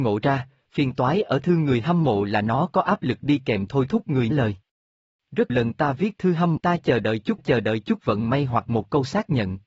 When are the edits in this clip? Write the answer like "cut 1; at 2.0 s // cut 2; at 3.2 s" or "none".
cut 1; at 4.3 s // cut 2; at 5.5 s // cut 3; at 6.6 s // cut 4; at 7.4 s